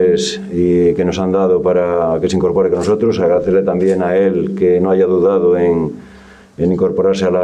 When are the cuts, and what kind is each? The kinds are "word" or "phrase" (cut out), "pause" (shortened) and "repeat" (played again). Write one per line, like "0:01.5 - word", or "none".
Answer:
none